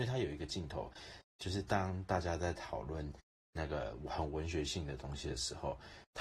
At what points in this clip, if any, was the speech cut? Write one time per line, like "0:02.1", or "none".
none